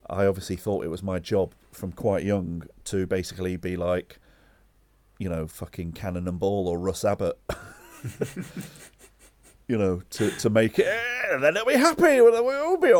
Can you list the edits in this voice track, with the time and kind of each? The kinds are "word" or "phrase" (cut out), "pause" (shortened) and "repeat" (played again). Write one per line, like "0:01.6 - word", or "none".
none